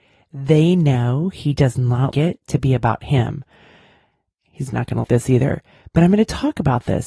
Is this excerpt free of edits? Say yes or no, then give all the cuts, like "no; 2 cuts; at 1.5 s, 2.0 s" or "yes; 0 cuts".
no; 3 cuts; at 2.1 s, 4.7 s, 5.0 s